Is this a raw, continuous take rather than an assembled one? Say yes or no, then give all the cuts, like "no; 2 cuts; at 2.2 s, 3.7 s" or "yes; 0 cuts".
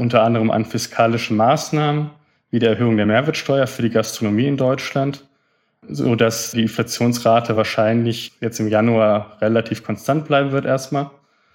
yes; 0 cuts